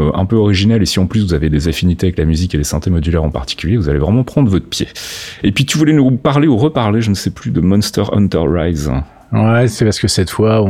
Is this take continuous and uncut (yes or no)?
yes